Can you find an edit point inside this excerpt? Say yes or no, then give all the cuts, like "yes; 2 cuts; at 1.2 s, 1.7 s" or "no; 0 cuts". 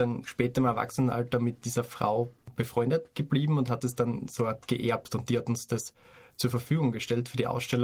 no; 0 cuts